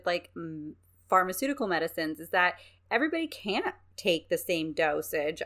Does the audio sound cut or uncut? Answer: uncut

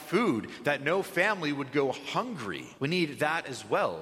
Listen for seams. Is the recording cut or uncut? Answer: cut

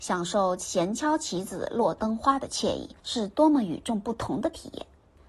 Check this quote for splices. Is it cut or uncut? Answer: cut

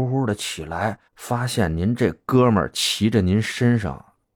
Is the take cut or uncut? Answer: cut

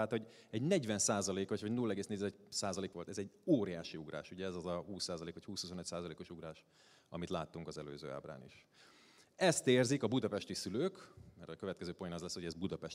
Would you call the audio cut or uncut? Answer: cut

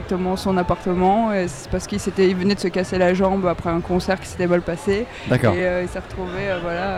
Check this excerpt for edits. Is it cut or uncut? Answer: uncut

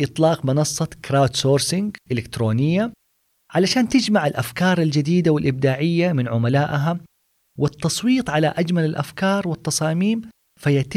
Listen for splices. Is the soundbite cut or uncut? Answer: uncut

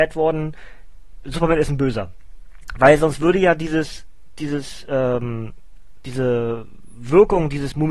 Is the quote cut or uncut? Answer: uncut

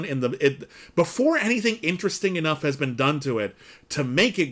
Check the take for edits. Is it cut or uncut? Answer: uncut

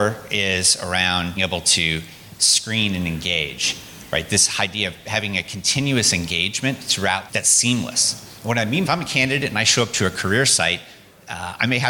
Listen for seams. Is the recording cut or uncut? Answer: cut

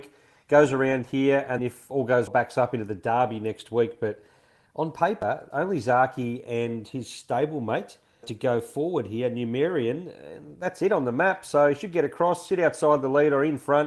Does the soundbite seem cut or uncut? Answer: cut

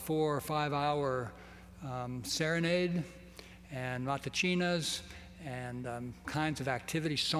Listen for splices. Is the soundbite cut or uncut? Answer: cut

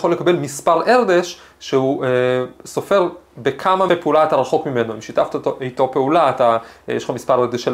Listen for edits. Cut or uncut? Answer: cut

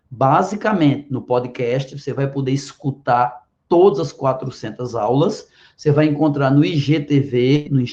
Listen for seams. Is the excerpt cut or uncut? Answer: uncut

